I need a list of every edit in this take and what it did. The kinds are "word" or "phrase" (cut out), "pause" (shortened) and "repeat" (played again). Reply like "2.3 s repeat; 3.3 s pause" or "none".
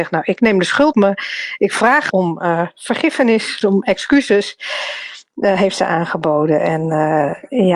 0.9 s word; 2.1 s phrase; 3.6 s word

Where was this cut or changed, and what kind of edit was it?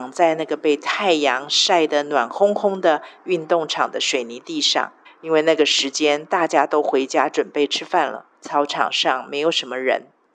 5.1 s pause; 8.4 s pause

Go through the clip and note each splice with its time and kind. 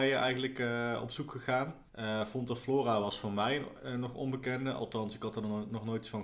1.9 s pause

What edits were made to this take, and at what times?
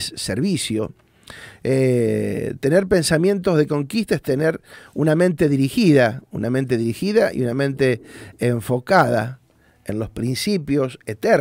none

